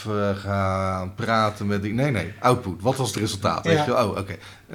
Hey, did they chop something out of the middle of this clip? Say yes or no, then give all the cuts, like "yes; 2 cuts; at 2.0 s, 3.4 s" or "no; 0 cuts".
no; 0 cuts